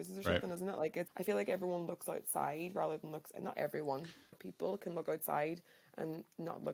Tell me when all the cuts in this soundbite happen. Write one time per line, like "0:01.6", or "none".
0:01.1
0:04.3